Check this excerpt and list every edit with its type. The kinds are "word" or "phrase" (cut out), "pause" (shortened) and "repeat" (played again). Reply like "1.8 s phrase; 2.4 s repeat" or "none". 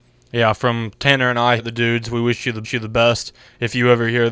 1.6 s word; 2.6 s repeat